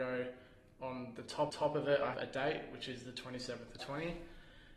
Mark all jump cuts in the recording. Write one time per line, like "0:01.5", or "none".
0:01.5
0:02.1
0:03.8